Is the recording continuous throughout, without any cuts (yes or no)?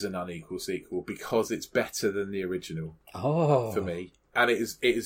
yes